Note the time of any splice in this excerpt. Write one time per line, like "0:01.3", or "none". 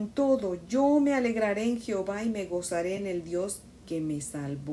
none